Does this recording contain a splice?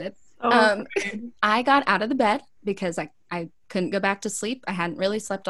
yes; 1 cut; at 1.4 s

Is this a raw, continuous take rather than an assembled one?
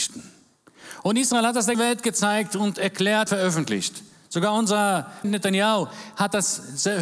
no; 3 cuts; at 1.7 s, 3.3 s, 5.2 s

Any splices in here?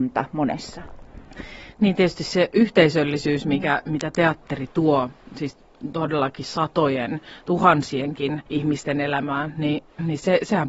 yes; 1 cut; at 8.5 s

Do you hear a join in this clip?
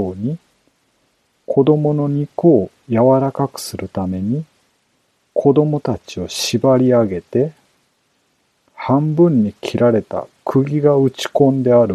no; 0 cuts

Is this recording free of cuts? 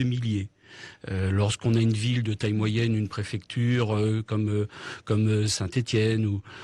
yes; 0 cuts

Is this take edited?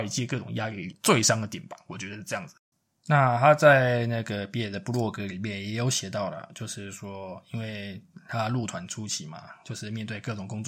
yes; 1 cut; at 2.7 s

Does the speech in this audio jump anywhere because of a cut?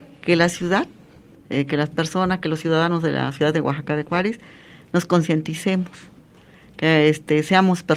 no; 0 cuts

